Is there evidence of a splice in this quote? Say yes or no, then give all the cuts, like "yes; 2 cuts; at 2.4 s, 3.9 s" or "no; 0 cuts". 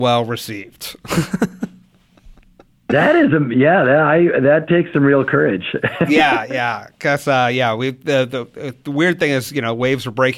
no; 0 cuts